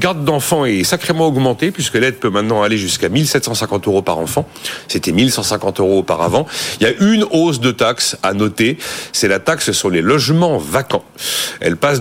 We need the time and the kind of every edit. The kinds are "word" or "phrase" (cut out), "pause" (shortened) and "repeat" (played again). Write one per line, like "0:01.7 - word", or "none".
none